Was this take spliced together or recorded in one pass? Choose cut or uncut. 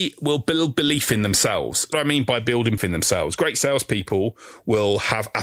cut